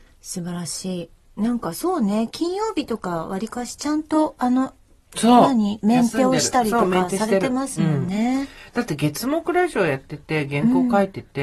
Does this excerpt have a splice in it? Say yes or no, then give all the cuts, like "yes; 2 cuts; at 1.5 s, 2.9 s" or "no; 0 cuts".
no; 0 cuts